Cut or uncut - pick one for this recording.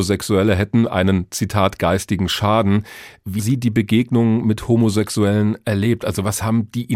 cut